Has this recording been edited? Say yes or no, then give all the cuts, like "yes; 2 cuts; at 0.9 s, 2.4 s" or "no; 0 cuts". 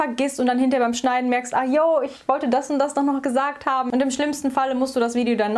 no; 0 cuts